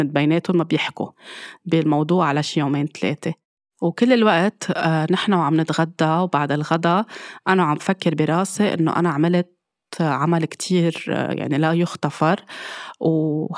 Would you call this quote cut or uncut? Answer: uncut